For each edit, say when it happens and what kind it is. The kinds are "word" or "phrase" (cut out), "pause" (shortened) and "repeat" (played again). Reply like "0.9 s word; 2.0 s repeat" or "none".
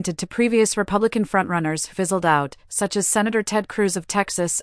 1.9 s word